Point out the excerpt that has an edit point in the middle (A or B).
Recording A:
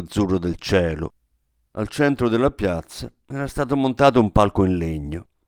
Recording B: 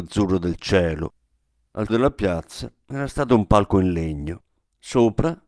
B